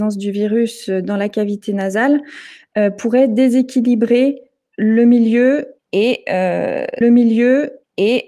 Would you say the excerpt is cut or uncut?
cut